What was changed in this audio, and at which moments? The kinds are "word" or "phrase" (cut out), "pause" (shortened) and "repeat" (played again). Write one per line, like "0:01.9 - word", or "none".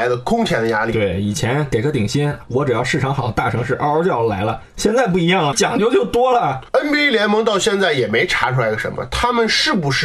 0:05.5 - word